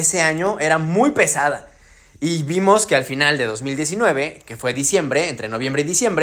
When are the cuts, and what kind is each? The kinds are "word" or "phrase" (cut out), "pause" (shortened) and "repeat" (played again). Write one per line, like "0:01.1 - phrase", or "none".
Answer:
none